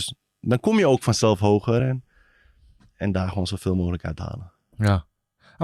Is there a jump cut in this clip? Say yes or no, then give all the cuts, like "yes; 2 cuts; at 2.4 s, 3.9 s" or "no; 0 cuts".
no; 0 cuts